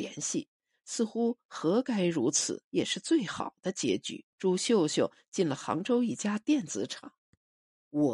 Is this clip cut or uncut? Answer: cut